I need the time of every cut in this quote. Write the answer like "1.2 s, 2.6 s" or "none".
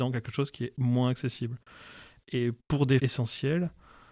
2.6 s, 3.0 s